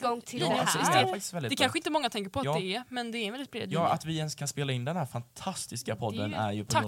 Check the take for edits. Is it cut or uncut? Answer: uncut